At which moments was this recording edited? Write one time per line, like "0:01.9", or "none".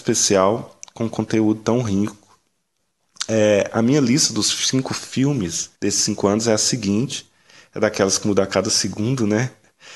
0:05.7